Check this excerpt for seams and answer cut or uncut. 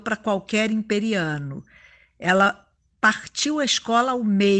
uncut